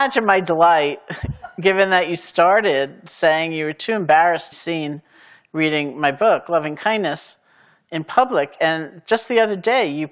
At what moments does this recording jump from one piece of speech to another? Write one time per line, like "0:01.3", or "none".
0:04.5